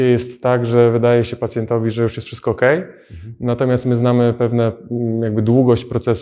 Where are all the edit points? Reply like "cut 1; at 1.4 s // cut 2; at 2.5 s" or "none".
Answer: none